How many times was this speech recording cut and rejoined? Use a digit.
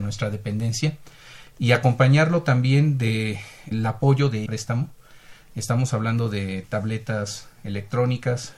2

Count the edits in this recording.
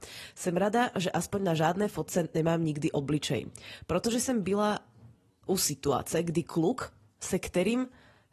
0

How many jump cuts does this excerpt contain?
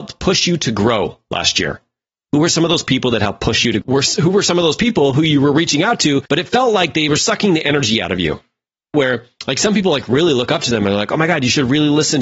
3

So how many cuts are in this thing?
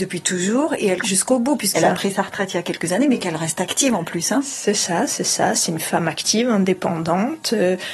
2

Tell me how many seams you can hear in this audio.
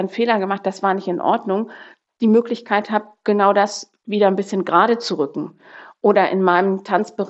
0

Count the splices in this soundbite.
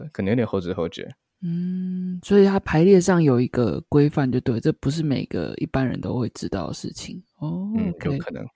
1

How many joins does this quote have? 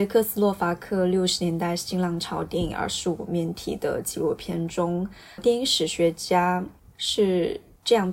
1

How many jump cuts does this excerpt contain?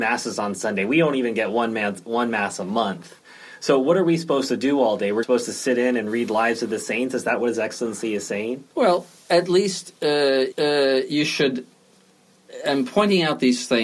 3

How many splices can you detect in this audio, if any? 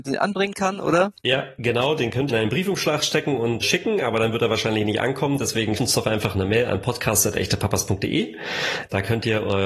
4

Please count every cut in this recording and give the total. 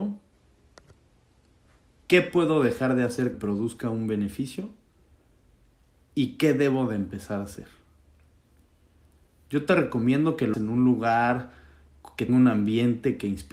3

